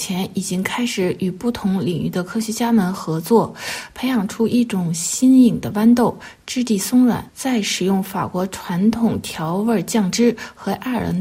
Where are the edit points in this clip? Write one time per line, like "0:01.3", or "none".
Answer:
0:07.3

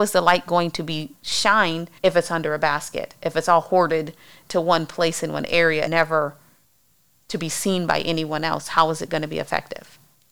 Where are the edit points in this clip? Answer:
0:02.0
0:05.9

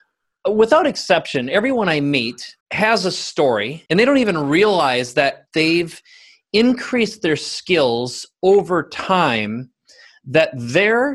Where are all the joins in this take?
0:02.6
0:03.9
0:05.5

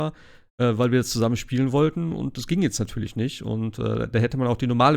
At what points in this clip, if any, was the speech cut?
none

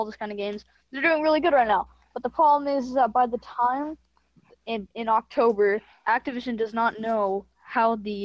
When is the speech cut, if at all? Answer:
0:06.0

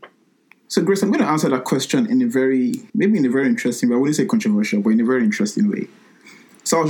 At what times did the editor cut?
0:02.9

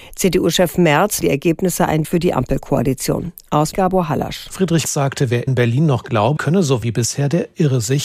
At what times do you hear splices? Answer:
0:01.2
0:02.0
0:03.7
0:04.9
0:05.5
0:06.4
0:06.8

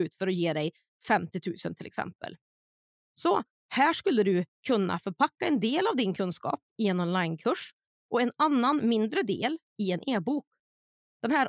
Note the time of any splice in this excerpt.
none

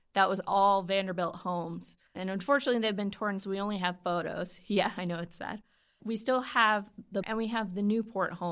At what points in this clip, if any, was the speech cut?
0:02.1
0:03.4
0:06.0
0:07.2

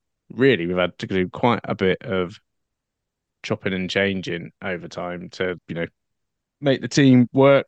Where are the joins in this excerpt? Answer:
0:04.6
0:05.6

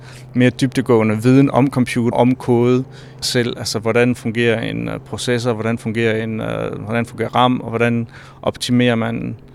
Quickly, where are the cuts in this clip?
0:02.1
0:03.2

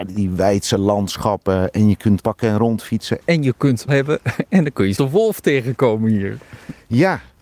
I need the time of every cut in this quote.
0:02.2
0:03.9
0:05.0

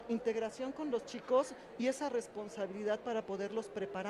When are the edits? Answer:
none

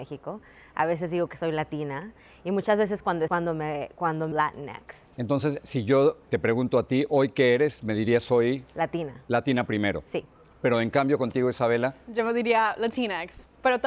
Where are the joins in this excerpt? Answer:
0:03.3
0:04.3
0:05.0
0:06.3

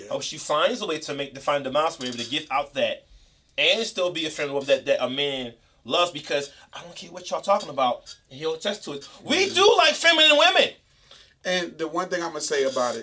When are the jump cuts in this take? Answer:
none

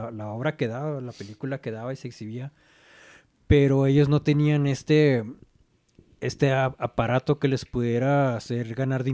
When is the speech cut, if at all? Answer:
none

